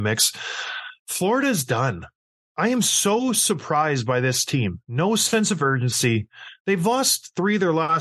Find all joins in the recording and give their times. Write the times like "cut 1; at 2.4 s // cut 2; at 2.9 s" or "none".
none